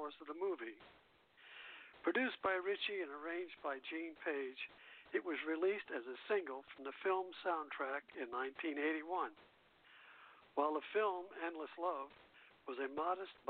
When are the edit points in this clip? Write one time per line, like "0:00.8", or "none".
none